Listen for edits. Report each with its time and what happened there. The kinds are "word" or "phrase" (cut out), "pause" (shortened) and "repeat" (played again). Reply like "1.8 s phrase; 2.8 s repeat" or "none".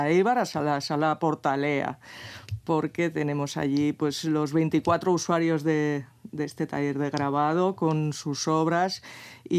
none